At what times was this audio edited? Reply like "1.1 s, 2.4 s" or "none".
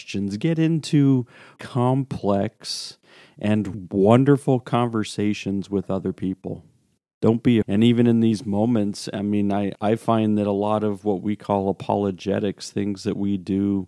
1.6 s, 3.7 s, 7.6 s, 9.7 s